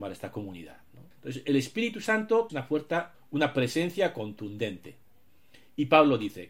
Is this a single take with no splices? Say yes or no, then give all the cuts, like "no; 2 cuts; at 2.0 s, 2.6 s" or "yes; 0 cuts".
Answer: no; 3 cuts; at 1.1 s, 2.5 s, 3.1 s